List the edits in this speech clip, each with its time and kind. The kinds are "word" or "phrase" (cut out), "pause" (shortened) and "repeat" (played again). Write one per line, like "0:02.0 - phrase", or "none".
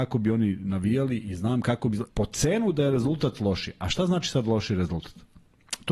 0:02.1 - pause